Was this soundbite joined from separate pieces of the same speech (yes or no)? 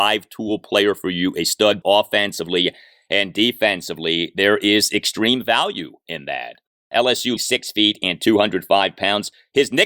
yes